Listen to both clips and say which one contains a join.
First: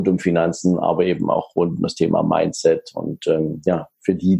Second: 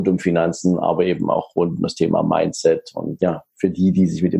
second; 1 cut; at 3.2 s

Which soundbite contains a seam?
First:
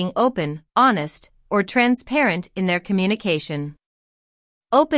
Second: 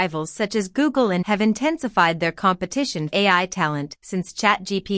second; 2 cuts; at 1.2 s, 3.1 s

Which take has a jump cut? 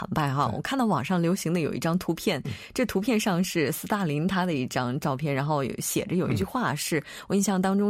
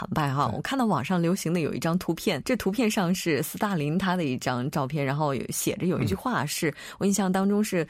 second; 1 cut; at 2.4 s

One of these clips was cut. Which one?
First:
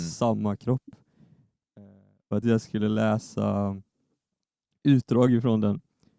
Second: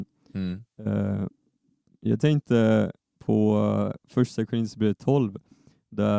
first; 1 cut; at 2.4 s

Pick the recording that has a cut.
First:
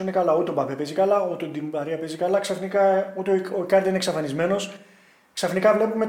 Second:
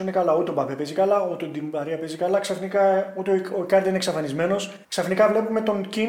second; 1 cut; at 4.8 s

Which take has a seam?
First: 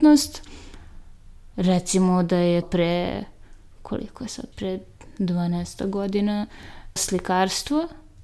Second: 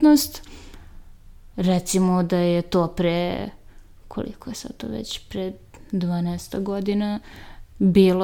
first; 3 cuts; at 2.6 s, 4.5 s, 7.0 s

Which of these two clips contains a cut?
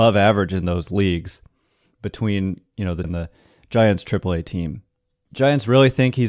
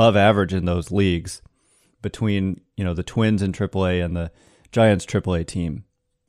first; 1 cut; at 3.0 s

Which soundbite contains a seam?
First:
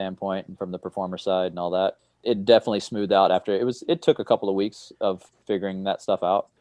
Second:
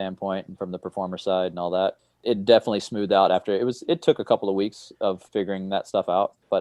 second; 1 cut; at 5.3 s

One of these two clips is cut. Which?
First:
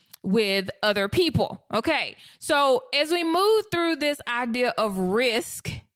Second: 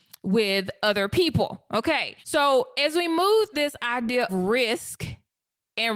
second; 3 cuts; at 2.2 s, 3.5 s, 4.3 s

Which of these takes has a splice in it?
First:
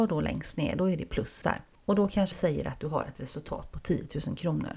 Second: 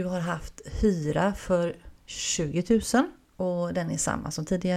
first; 2 cuts; at 1.4 s, 2.3 s

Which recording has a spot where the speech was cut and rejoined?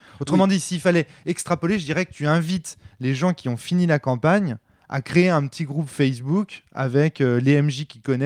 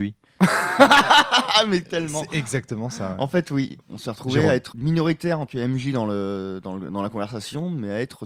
second; 3 cuts; at 3.8 s, 4.7 s, 5.5 s

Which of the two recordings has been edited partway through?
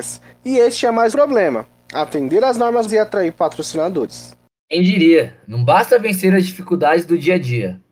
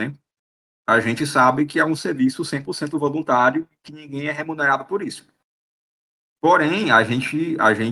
first; 3 cuts; at 1.1 s, 2.9 s, 3.4 s

